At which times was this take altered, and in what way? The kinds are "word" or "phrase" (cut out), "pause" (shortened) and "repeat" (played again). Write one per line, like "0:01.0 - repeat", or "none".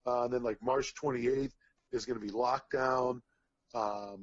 none